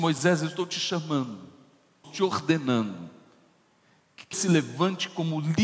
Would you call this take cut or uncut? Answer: cut